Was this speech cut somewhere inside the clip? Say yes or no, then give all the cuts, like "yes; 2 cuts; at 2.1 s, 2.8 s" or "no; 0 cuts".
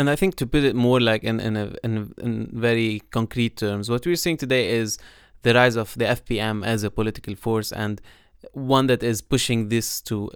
no; 0 cuts